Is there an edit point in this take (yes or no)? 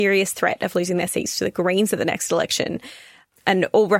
no